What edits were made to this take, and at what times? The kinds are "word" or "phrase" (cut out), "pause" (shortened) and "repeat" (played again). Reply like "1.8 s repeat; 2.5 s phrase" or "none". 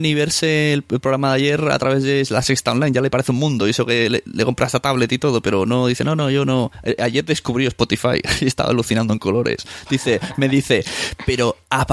none

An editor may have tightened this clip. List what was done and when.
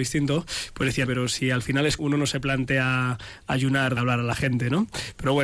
1.1 s word; 2.0 s word; 4.0 s word

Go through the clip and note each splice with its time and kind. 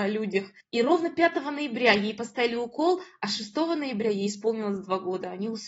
none

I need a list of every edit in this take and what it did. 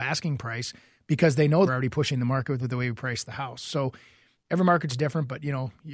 1.6 s phrase; 4.3 s phrase

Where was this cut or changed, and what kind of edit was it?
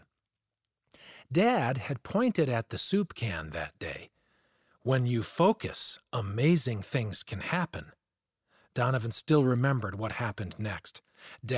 none

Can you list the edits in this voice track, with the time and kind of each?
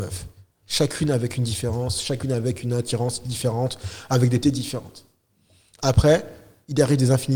4.4 s word

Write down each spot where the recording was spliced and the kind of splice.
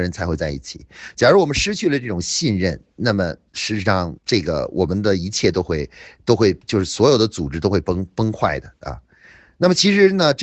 4.2 s pause; 6.6 s pause

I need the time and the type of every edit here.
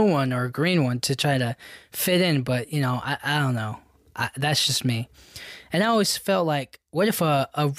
none

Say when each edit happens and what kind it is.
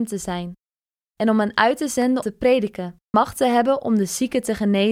2.2 s word; 3.1 s word

